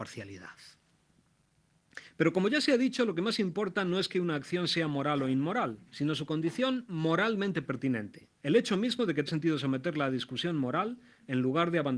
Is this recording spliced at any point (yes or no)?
yes